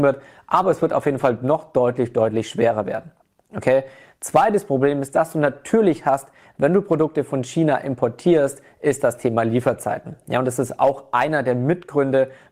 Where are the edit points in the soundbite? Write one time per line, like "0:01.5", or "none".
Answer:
none